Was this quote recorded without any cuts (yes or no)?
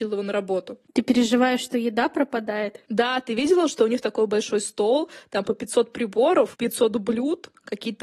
yes